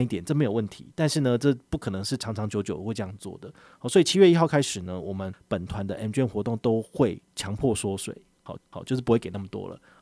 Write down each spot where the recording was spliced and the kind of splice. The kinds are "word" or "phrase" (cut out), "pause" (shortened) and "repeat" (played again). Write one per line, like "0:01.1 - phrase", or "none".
0:07.3 - pause
0:08.6 - repeat